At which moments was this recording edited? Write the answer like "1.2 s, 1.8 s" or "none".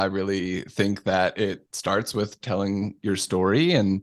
none